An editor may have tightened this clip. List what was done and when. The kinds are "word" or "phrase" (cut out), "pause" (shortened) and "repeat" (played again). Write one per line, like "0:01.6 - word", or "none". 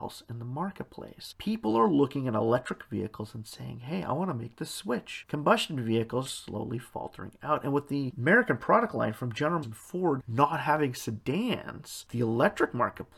0:06.3 - word
0:09.6 - word